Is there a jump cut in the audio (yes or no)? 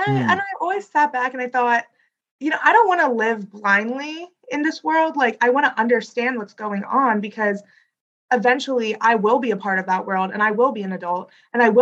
no